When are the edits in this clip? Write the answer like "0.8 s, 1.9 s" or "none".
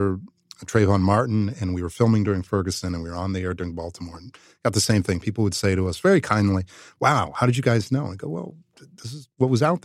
none